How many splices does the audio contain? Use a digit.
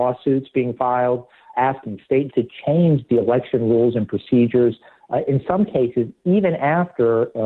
2